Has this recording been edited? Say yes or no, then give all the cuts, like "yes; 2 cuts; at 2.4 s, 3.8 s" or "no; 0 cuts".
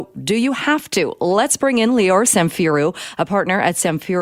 no; 0 cuts